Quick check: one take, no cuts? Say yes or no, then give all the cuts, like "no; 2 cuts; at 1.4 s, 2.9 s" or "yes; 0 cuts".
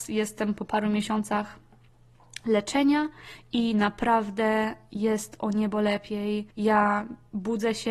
no; 1 cut; at 6.5 s